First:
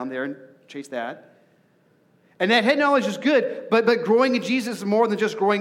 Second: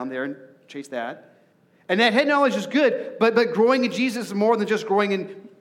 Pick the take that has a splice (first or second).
second